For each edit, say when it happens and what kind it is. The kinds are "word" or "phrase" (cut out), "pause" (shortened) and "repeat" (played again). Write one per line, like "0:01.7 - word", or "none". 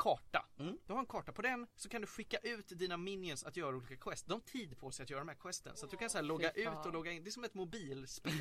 0:04.4 - phrase